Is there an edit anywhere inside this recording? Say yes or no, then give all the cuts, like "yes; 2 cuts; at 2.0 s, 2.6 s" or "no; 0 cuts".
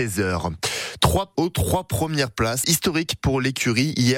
yes; 2 cuts; at 1.3 s, 2.6 s